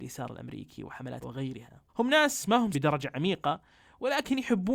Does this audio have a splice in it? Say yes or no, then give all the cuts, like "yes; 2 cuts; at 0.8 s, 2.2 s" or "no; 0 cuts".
yes; 3 cuts; at 1.2 s, 1.9 s, 2.7 s